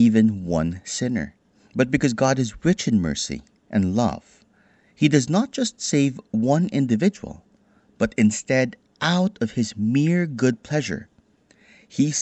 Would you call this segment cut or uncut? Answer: uncut